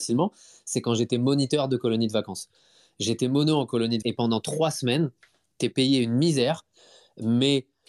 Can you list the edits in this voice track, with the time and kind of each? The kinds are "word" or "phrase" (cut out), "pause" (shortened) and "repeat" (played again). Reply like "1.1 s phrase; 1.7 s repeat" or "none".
4.0 s word

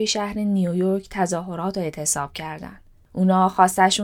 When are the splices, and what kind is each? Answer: none

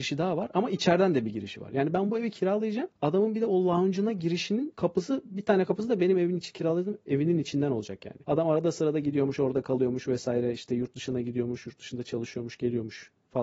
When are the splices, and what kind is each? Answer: 8.2 s pause

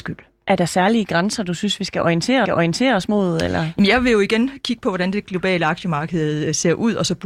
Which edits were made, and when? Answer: 2.4 s repeat

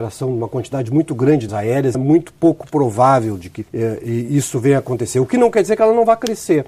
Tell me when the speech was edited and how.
1.5 s word; 1.9 s word; 3.7 s pause

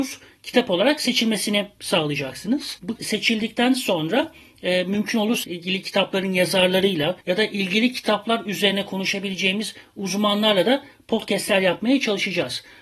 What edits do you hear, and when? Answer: 3.0 s word; 5.4 s word; 7.2 s pause

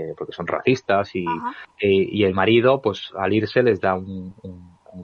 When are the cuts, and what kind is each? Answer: 1.7 s pause

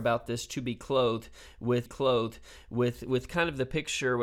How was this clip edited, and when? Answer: 1.9 s repeat

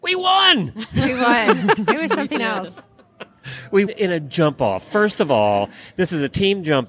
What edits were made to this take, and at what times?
3.9 s word

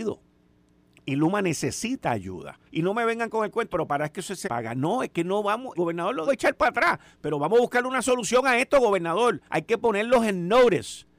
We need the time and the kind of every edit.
2.7 s pause; 3.7 s word; 4.4 s word; 5.7 s word; 6.3 s phrase; 9.5 s pause

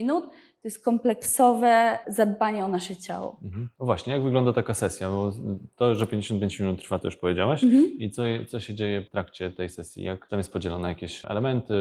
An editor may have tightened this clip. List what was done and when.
none

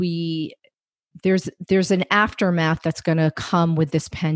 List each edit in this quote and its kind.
none

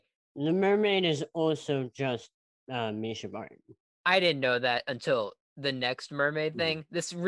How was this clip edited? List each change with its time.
none

